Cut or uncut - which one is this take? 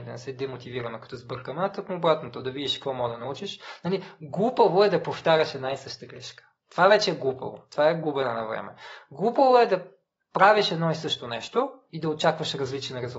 uncut